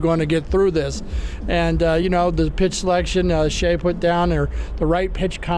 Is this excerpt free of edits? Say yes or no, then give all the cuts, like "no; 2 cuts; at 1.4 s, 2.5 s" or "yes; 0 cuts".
yes; 0 cuts